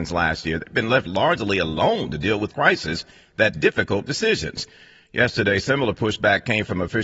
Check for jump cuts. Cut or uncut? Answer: cut